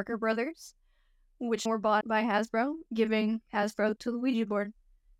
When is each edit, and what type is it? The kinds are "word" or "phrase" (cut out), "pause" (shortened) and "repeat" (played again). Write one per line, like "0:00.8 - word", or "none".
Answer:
0:01.7 - word
0:02.0 - word
0:04.0 - word